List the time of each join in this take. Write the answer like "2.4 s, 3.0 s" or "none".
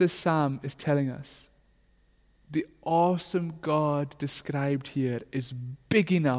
none